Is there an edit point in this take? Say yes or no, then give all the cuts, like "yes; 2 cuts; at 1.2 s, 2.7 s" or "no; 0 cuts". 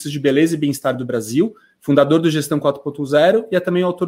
no; 0 cuts